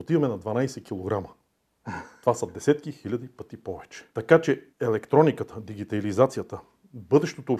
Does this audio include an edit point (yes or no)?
yes